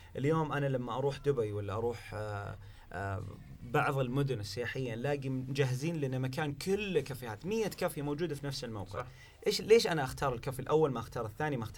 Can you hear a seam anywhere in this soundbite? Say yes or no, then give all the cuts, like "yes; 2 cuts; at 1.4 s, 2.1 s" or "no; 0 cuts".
no; 0 cuts